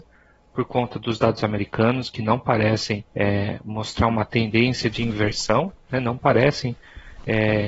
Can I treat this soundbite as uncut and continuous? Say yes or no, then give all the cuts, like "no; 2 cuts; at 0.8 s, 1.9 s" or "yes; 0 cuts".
no; 1 cut; at 3.1 s